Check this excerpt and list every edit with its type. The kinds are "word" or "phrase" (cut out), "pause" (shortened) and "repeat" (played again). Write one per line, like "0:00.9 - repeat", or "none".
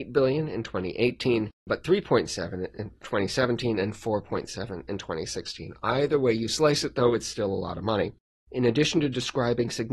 0:01.5 - pause
0:08.3 - pause

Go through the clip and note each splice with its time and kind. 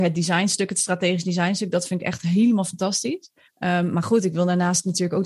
0:03.4 - pause

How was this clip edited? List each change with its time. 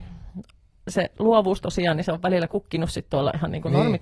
none

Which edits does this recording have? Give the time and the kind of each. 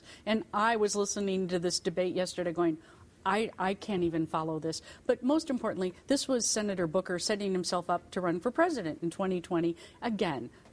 none

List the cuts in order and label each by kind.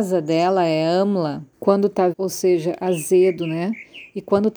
0:01.5 - pause
0:02.1 - word

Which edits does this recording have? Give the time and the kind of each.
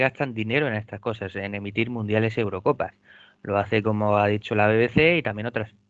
none

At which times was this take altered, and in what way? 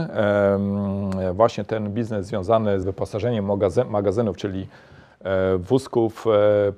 0:02.8 - word

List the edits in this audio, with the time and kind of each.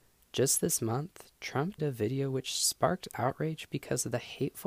0:01.8 - word

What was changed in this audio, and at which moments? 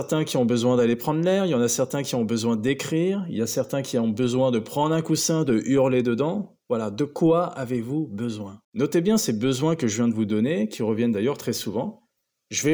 0:08.6 - pause

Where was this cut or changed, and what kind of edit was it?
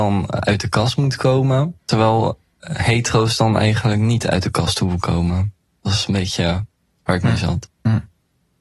0:01.8 - pause

